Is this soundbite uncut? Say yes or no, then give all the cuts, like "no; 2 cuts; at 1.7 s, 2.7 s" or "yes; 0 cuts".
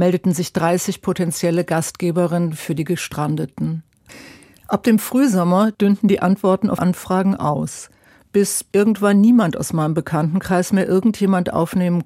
no; 1 cut; at 6.8 s